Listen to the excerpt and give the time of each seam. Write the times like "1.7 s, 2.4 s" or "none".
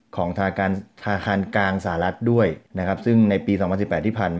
2.7 s